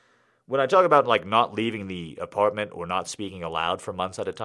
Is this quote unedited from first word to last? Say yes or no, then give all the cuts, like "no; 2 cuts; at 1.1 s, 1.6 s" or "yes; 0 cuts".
yes; 0 cuts